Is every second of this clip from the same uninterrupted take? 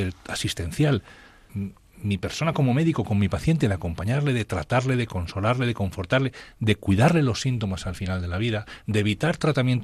no; 1 cut; at 1.5 s

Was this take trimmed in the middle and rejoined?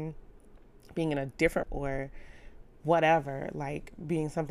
yes; 1 cut; at 1.6 s

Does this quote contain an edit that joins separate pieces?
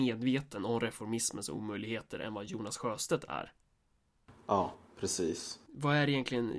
no; 0 cuts

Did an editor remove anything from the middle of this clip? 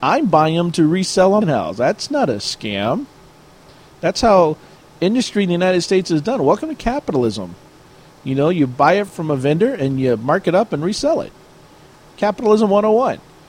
yes; 2 cuts; at 1.4 s, 9.1 s

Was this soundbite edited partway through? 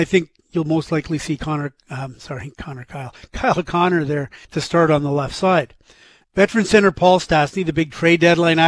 yes; 1 cut; at 4.4 s

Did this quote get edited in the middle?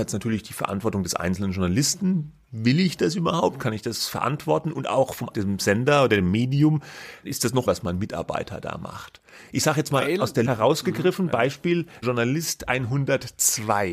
yes; 5 cuts; at 5.3 s, 7.2 s, 7.7 s, 10.5 s, 12.0 s

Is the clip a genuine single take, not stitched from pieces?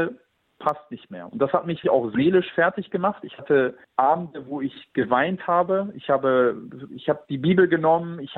no; 2 cuts; at 1.8 s, 3.8 s

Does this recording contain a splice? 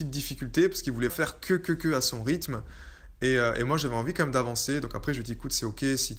yes; 1 cut; at 1.1 s

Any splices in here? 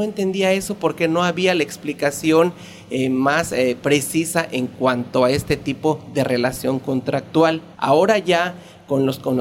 yes; 1 cut; at 7.7 s

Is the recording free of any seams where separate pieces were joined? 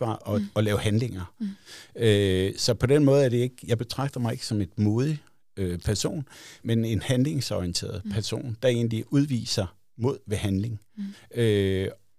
no; 1 cut; at 6.6 s

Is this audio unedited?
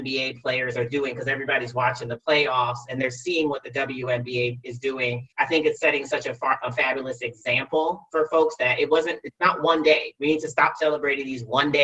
no; 1 cut; at 5.3 s

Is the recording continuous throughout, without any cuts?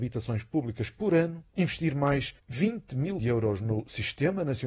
no; 3 cuts; at 1.5 s, 2.4 s, 3.2 s

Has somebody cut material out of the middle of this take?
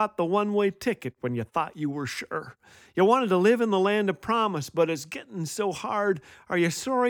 no; 0 cuts

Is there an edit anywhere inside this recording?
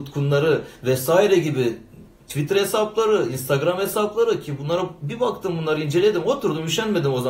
no; 0 cuts

